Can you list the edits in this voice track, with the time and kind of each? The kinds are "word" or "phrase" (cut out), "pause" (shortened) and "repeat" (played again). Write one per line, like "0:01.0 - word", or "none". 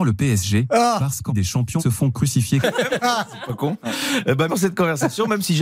0:01.3 - word
0:01.8 - word
0:02.6 - word
0:04.5 - word